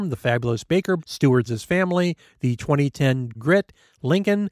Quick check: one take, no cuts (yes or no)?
no